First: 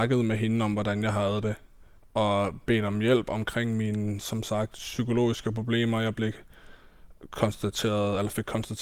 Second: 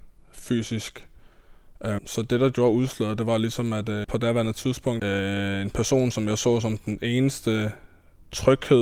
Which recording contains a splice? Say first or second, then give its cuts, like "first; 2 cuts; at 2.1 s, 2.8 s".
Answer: second; 3 cuts; at 2.0 s, 4.0 s, 5.0 s